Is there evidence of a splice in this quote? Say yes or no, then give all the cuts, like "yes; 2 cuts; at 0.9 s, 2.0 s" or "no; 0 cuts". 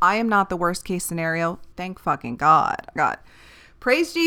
yes; 2 cuts; at 1.7 s, 3.0 s